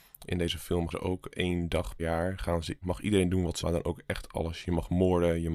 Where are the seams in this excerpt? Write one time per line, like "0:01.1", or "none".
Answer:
0:00.9
0:01.3
0:02.0
0:02.8
0:03.6